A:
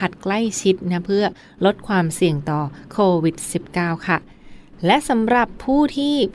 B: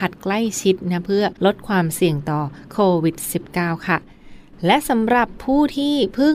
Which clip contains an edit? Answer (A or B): B